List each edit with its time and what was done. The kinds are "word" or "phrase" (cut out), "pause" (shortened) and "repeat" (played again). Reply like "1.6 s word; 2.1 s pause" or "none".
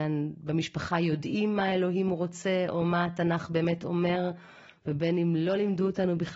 none